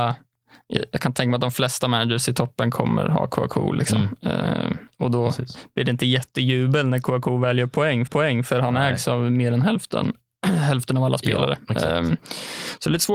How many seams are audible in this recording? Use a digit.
2